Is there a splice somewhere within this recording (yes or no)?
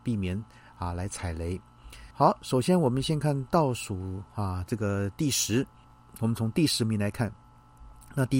yes